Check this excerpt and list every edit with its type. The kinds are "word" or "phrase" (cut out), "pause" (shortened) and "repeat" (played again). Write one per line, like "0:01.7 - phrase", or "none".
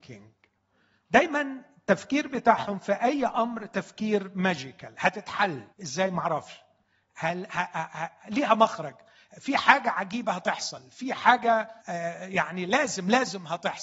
0:05.7 - pause
0:11.8 - pause